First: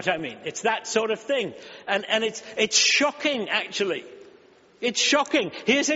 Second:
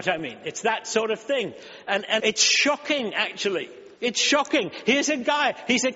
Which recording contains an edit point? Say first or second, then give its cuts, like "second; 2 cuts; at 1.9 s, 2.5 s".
second; 2 cuts; at 2.2 s, 4.0 s